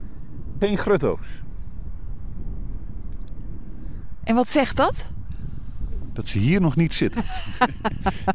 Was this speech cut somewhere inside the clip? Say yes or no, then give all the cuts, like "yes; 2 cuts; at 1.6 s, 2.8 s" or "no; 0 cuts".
no; 0 cuts